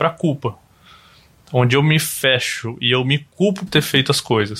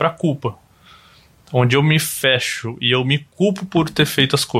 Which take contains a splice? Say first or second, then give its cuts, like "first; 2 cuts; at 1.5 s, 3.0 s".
first; 1 cut; at 3.7 s